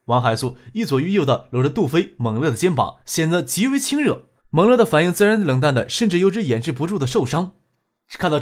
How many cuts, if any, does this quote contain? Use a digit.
2